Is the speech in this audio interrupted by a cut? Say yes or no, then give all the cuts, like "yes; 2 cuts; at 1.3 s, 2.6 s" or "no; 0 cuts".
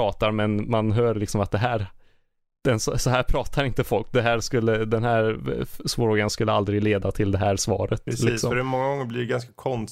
no; 0 cuts